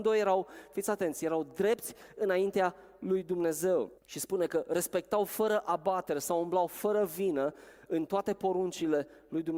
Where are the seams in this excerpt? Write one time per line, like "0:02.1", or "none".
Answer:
0:04.0